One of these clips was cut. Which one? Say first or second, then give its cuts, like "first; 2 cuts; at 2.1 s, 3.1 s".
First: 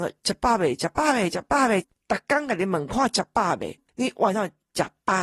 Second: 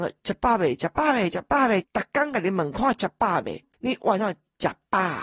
second; 1 cut; at 1.9 s